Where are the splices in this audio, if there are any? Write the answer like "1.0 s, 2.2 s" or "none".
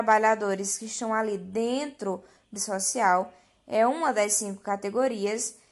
2.6 s